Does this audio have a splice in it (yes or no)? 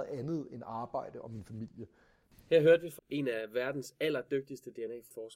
yes